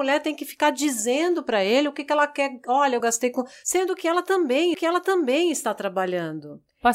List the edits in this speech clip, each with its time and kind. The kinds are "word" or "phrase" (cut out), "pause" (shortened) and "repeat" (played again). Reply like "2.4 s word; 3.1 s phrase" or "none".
3.0 s phrase; 4.7 s repeat